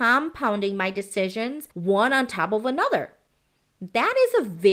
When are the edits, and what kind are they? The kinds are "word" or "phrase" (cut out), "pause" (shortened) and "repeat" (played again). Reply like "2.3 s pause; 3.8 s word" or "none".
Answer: 1.7 s pause